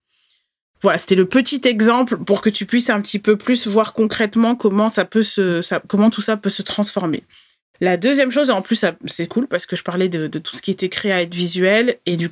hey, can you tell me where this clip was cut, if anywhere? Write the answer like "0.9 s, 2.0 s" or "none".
none